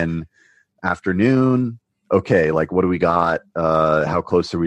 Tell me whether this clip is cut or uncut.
uncut